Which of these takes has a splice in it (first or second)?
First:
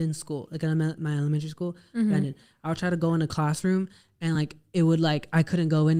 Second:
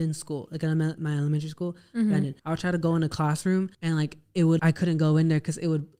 second